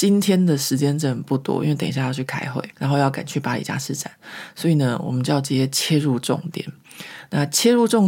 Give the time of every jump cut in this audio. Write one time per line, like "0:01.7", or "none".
0:02.7